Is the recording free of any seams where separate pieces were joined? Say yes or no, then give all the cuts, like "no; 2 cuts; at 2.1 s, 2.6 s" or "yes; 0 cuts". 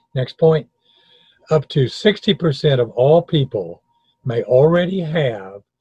yes; 0 cuts